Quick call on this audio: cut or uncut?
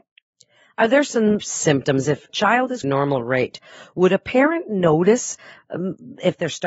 cut